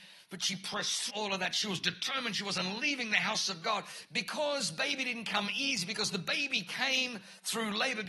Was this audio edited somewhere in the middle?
yes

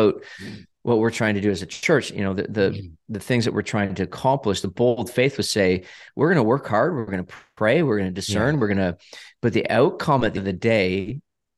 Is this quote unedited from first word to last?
no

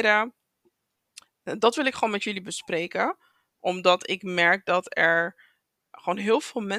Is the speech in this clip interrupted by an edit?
yes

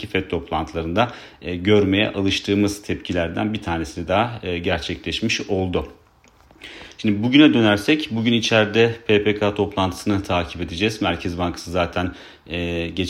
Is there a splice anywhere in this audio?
no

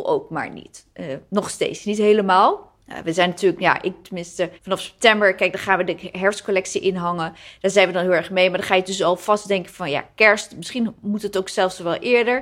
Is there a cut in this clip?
yes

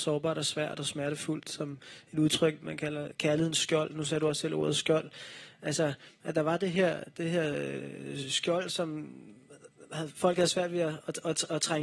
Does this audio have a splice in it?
no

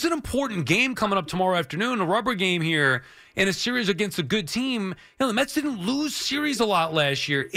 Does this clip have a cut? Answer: no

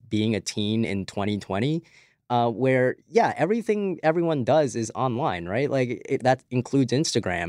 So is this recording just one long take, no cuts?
yes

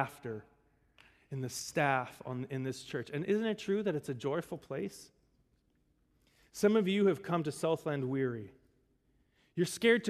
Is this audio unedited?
yes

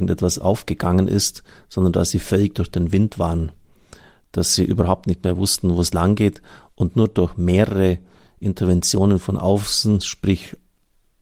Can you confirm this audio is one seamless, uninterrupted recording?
yes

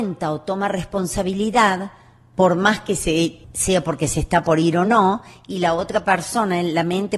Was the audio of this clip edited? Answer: no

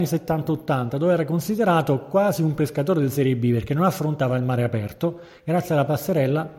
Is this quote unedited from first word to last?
yes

